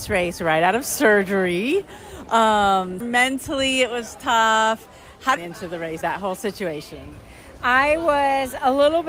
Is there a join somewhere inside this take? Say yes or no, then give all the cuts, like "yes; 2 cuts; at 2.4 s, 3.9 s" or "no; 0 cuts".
yes; 3 cuts; at 3.0 s, 5.4 s, 6.0 s